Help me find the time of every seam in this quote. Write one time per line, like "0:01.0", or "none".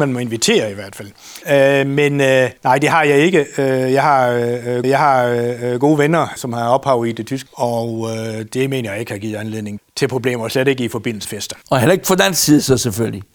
0:01.4
0:02.6
0:04.8
0:06.4
0:07.5
0:09.8
0:11.2
0:11.6

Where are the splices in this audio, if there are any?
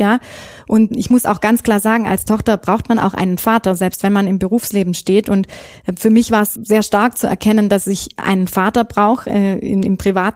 0:00.9
0:06.5

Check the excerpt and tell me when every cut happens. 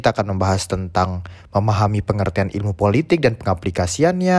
none

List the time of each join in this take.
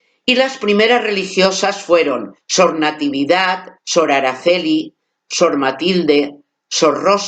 0:02.4
0:03.8

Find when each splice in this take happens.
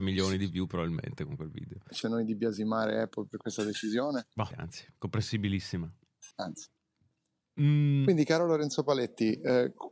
0:02.0
0:04.5
0:06.3

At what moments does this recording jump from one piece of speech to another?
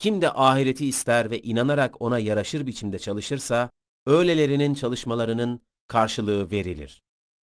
none

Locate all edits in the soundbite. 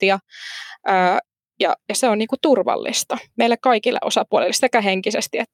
none

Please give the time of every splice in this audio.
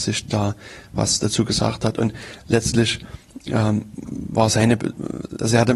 none

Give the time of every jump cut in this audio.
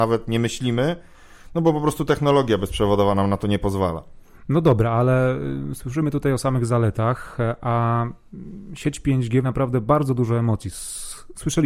0:09.4

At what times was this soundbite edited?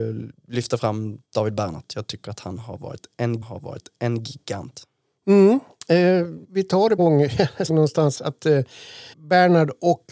0:01.2
0:03.4
0:06.4
0:07.0
0:07.7
0:09.1

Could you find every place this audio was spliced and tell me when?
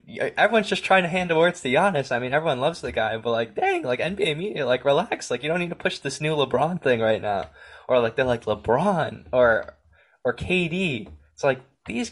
none

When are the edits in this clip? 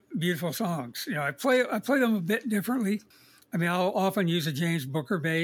0:03.1

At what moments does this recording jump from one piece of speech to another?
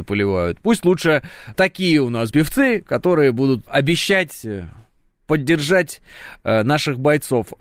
0:01.5
0:02.3
0:03.7

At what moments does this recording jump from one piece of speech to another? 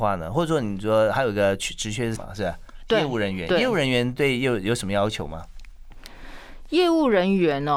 0:02.1

